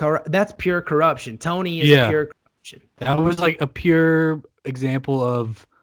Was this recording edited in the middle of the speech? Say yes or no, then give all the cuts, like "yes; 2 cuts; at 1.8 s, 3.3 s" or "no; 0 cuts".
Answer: yes; 1 cut; at 2.9 s